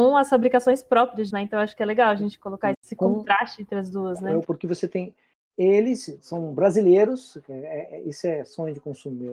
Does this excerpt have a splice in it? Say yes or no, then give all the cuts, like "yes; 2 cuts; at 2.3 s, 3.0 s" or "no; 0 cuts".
yes; 4 cuts; at 1.3 s, 2.7 s, 4.4 s, 6.2 s